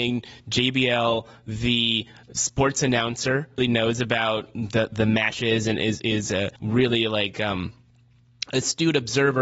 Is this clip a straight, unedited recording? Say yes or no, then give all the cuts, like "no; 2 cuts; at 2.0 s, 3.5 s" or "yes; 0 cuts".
no; 2 cuts; at 3.6 s, 6.6 s